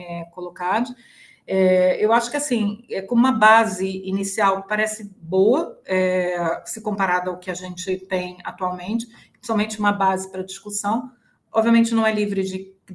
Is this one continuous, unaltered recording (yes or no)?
yes